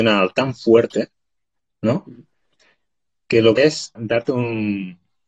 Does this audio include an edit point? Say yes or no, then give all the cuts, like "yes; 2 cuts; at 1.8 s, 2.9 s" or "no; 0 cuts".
yes; 2 cuts; at 3.6 s, 4.0 s